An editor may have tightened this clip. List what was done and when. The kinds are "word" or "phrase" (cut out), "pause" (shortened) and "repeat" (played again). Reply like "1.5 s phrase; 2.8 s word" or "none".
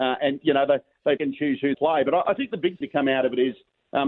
1.2 s word; 1.7 s word; 2.8 s word